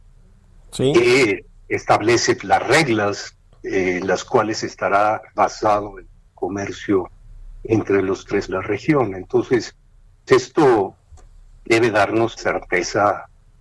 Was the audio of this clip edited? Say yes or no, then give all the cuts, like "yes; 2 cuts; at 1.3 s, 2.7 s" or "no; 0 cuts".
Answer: yes; 5 cuts; at 2.4 s, 5.3 s, 8.5 s, 10.3 s, 12.4 s